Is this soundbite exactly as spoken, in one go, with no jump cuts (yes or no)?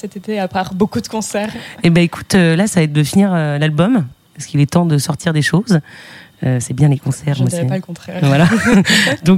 yes